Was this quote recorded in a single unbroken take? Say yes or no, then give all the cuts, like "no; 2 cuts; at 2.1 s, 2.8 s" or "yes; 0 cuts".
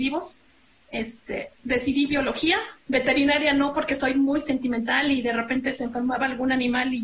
no; 1 cut; at 2.8 s